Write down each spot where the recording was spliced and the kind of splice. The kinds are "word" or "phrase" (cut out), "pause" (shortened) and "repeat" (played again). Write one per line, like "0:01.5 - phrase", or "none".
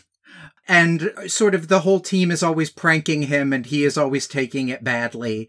none